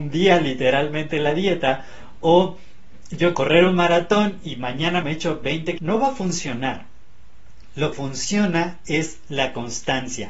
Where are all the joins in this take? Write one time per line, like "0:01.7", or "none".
0:03.3
0:05.0
0:05.8
0:07.9